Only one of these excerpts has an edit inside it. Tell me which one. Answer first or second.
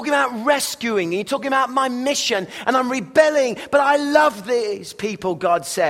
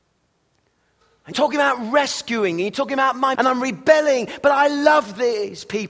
second